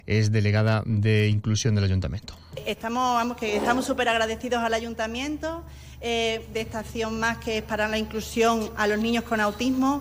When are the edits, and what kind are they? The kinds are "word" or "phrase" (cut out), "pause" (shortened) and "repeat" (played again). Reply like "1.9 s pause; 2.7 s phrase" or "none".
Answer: none